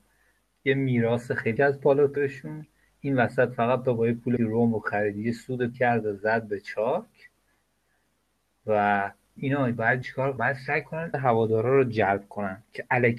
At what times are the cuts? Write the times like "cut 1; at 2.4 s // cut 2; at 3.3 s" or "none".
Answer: cut 1; at 1.6 s // cut 2; at 2.2 s // cut 3; at 3.9 s // cut 4; at 4.4 s // cut 5; at 5.7 s // cut 6; at 9.4 s // cut 7; at 10.0 s // cut 8; at 10.4 s // cut 9; at 11.1 s